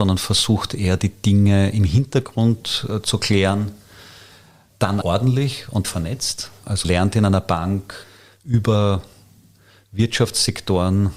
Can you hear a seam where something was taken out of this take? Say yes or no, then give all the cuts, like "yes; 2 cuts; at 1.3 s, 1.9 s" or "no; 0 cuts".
yes; 3 cuts; at 5.0 s, 5.8 s, 6.8 s